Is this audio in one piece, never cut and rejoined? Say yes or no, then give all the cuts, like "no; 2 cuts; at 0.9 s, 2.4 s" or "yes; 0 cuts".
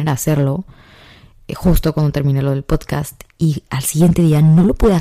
yes; 0 cuts